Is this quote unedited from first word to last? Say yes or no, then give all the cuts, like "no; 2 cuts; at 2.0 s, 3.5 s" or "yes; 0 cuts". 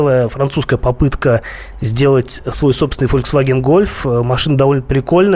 yes; 0 cuts